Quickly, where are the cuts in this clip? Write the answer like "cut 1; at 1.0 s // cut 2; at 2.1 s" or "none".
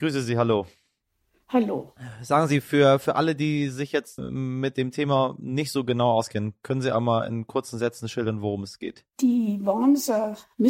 cut 1; at 4.2 s // cut 2; at 9.1 s